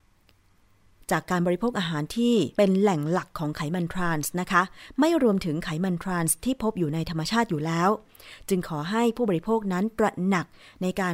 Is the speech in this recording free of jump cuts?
no; 1 cut; at 2.5 s

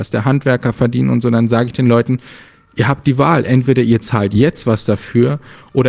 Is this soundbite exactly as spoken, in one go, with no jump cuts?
yes; 0 cuts

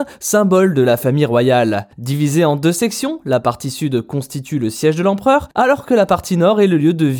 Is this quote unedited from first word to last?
yes; 0 cuts

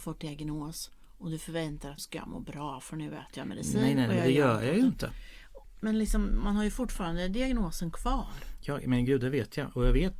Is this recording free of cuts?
no; 1 cut; at 2.0 s

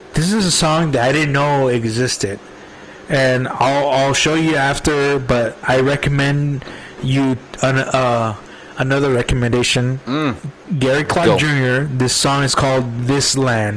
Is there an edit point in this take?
no; 0 cuts

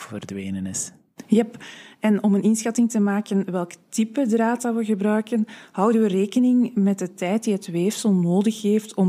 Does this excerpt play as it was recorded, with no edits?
yes; 0 cuts

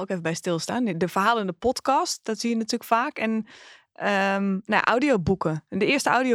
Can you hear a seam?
no; 0 cuts

